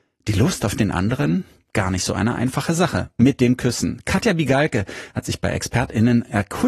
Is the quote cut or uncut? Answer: uncut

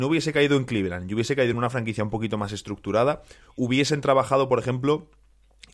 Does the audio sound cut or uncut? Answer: uncut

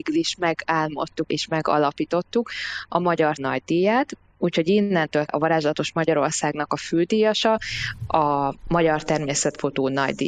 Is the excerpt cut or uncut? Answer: cut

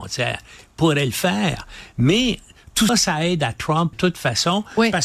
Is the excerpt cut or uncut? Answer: cut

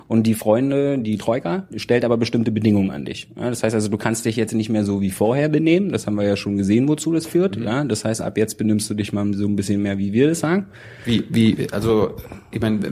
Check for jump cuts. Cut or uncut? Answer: uncut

